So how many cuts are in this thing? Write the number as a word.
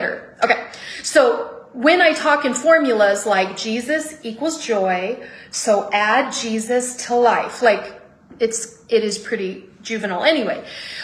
zero